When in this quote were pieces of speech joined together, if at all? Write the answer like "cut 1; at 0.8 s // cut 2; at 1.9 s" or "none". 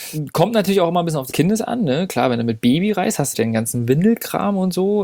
cut 1; at 1.3 s // cut 2; at 3.3 s